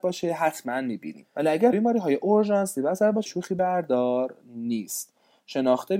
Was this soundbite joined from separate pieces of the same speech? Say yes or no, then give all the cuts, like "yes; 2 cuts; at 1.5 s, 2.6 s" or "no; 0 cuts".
yes; 3 cuts; at 1.3 s, 1.7 s, 3.3 s